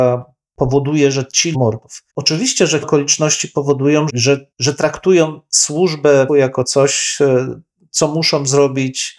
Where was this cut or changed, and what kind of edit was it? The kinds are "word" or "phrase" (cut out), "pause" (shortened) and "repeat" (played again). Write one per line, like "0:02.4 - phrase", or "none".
0:01.5 - phrase
0:02.1 - pause
0:02.8 - word
0:04.1 - word
0:04.5 - pause
0:06.3 - word